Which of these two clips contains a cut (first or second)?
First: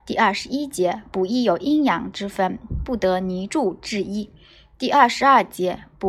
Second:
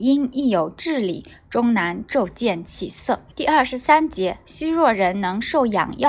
second